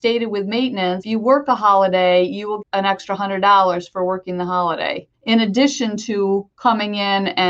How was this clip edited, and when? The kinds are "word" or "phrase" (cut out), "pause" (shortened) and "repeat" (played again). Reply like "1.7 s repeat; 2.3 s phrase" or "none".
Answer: 1.0 s word; 2.6 s word; 5.1 s pause; 6.5 s pause